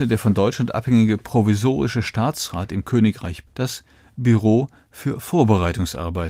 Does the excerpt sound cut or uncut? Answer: cut